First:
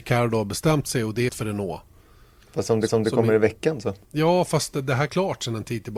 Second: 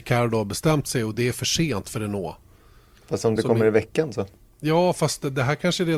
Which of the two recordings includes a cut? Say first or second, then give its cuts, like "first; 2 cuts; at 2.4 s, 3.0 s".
first; 4 cuts; at 1.3 s, 2.9 s, 4.0 s, 5.1 s